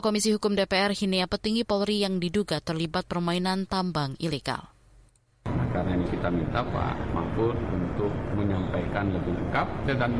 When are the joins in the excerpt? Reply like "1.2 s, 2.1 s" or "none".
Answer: 1.3 s, 6.1 s